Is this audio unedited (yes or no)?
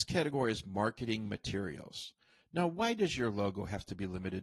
yes